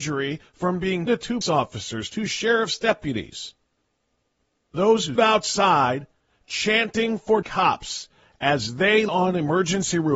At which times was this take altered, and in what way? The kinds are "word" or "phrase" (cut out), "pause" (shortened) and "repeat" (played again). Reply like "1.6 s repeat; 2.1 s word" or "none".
1.1 s word; 1.4 s word; 4.7 s word; 5.2 s word; 7.4 s word; 9.1 s word

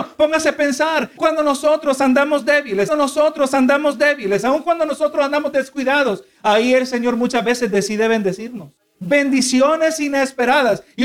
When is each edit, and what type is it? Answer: 1.2 s word; 2.9 s repeat; 8.8 s pause

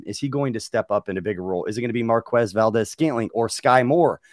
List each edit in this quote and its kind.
none

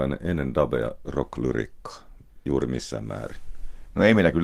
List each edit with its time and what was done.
1.0 s word

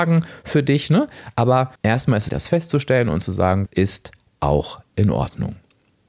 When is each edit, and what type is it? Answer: 1.7 s pause; 2.3 s phrase; 3.7 s word

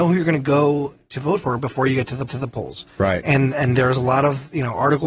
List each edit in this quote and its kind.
2.3 s repeat

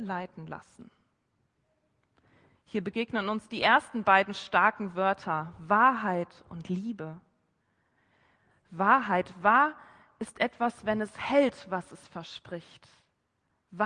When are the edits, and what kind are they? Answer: none

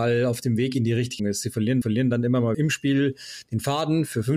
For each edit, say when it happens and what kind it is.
1.2 s word; 1.8 s repeat; 2.5 s word

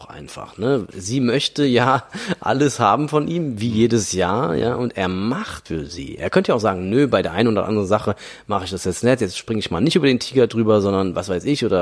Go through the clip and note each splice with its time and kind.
5.7 s word

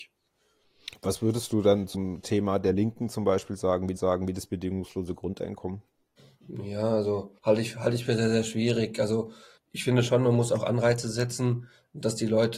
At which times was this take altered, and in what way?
1.9 s word; 4.0 s repeat; 6.2 s pause; 7.4 s pause; 8.1 s word; 9.6 s word

